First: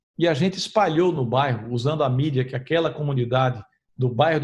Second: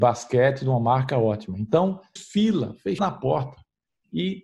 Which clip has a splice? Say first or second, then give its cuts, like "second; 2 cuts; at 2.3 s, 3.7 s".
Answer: second; 2 cuts; at 2.2 s, 3.0 s